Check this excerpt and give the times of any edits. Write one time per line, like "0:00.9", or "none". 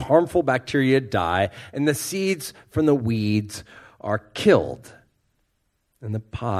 none